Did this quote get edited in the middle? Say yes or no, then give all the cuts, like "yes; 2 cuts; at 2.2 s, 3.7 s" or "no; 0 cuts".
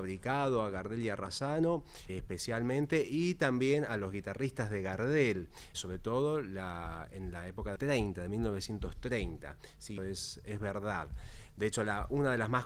yes; 4 cuts; at 2.1 s, 5.7 s, 7.8 s, 10.0 s